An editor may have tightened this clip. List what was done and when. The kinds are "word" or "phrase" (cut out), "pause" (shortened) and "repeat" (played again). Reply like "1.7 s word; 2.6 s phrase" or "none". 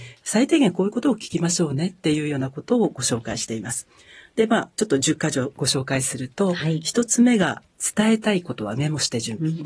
4.7 s pause